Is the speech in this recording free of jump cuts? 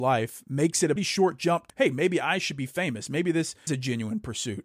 no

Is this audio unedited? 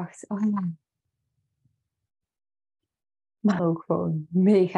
no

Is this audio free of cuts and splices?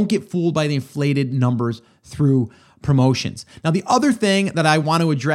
yes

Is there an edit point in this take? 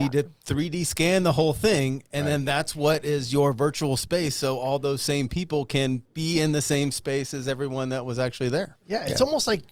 yes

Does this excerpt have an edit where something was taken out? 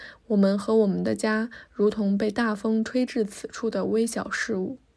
no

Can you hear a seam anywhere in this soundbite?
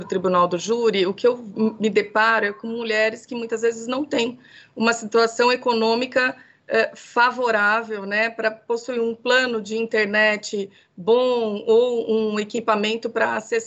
no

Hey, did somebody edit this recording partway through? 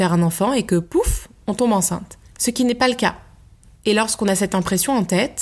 no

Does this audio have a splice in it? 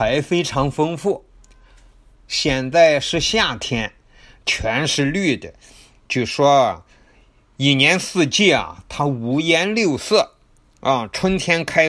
no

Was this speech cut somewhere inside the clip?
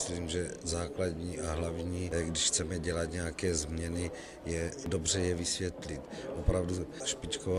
no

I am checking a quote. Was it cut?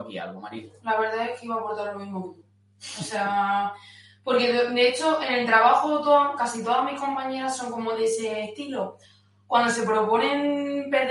no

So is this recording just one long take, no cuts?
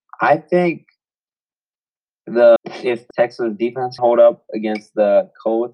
no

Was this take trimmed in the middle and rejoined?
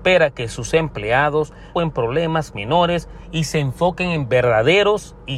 yes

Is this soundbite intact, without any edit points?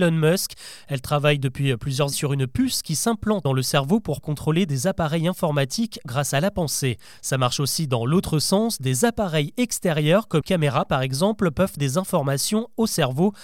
no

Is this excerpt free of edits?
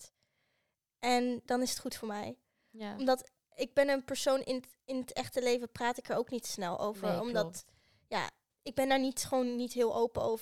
no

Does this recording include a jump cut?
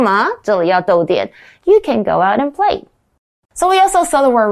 no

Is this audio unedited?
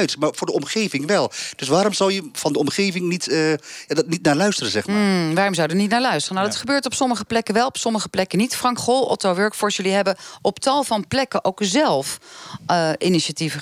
no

